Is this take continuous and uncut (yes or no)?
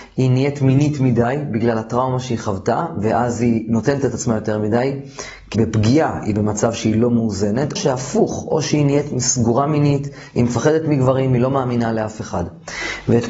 no